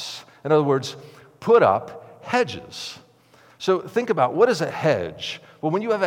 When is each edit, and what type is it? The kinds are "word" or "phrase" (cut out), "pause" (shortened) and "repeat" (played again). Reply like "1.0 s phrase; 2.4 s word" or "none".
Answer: none